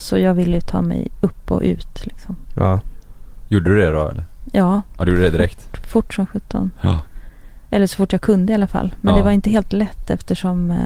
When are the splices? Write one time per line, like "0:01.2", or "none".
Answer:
none